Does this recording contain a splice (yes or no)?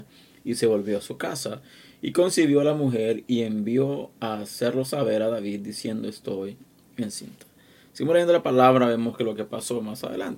no